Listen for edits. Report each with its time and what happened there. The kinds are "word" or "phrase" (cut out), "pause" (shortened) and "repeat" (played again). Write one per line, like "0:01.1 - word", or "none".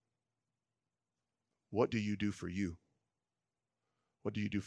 none